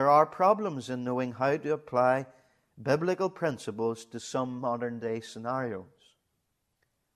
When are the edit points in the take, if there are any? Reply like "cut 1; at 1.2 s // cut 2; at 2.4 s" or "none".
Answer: none